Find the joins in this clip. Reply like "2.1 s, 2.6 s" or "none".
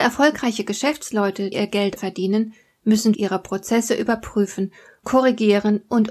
1.5 s, 2.0 s, 3.1 s, 5.0 s